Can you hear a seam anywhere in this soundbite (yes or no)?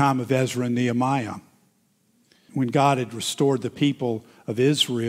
yes